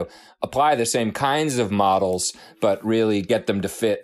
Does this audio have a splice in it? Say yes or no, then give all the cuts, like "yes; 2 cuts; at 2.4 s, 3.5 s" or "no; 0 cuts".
no; 0 cuts